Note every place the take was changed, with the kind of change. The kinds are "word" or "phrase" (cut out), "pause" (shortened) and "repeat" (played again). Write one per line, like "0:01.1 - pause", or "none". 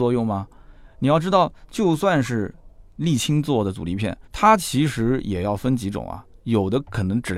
0:04.3 - pause

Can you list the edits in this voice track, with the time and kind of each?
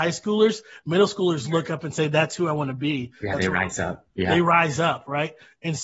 0:04.1 - pause

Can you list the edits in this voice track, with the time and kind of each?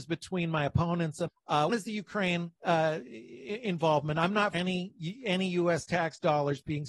0:01.3 - word
0:01.7 - word
0:02.6 - pause
0:04.5 - word

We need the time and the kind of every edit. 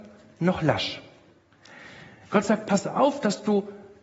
none

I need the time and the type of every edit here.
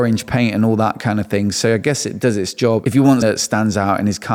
0:03.2 - word

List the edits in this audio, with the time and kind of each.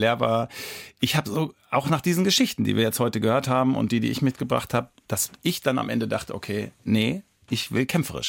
0:06.8 - pause

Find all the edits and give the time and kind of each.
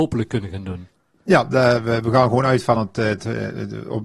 none

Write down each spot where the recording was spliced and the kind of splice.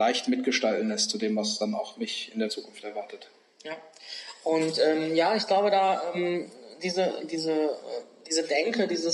none

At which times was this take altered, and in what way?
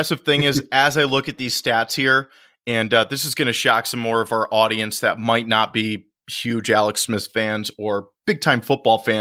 none

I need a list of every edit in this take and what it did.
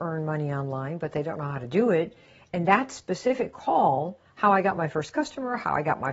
none

